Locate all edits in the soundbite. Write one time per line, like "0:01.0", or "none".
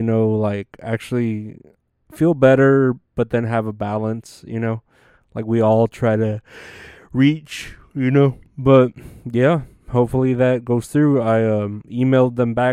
none

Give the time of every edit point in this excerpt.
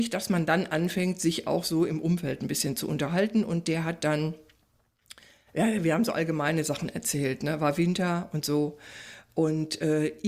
none

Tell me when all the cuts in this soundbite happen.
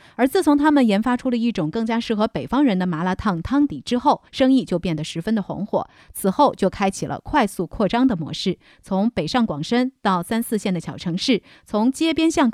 0:04.3

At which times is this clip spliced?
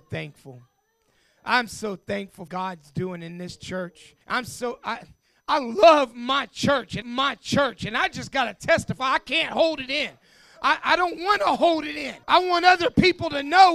0:02.5
0:04.2
0:07.0
0:12.2

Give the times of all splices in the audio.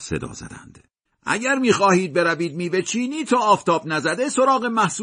0:01.1

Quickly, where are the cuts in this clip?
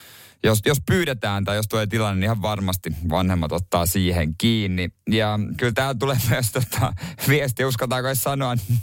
none

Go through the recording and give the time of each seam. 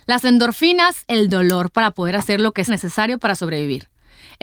0:01.1
0:02.7

